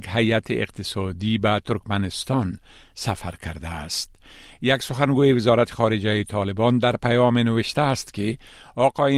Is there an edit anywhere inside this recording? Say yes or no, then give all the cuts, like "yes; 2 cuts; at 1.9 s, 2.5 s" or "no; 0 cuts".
no; 0 cuts